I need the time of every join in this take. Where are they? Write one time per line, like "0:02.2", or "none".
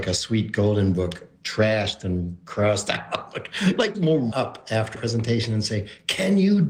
0:01.4
0:03.9
0:04.3
0:04.9